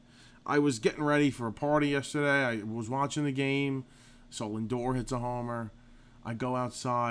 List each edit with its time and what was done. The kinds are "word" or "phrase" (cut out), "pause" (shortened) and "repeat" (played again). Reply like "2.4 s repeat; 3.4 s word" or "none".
none

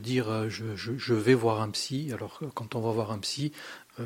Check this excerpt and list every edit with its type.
none

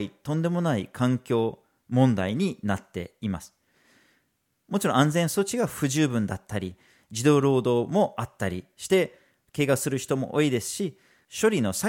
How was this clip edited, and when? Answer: none

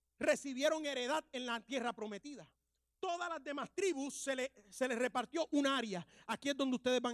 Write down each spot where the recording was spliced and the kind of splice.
none

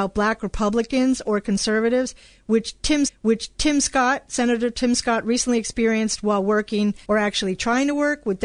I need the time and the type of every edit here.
3.1 s repeat; 7.0 s pause

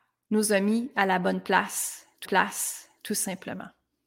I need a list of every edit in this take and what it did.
2.2 s repeat

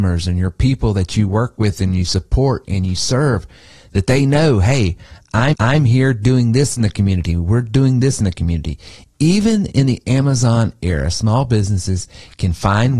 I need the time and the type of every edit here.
5.5 s repeat

